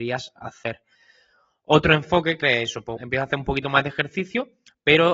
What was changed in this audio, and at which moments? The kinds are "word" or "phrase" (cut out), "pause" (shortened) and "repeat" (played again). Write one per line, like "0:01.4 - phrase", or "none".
0:02.4 - phrase
0:03.0 - word